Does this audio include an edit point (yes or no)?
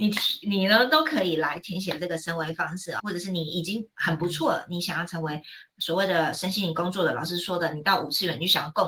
yes